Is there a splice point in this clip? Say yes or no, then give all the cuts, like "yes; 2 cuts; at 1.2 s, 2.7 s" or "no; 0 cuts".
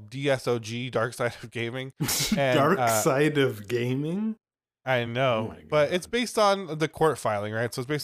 no; 0 cuts